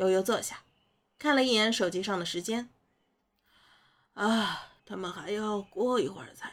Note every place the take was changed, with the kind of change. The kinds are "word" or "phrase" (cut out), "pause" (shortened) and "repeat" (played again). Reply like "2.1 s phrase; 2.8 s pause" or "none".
4.8 s pause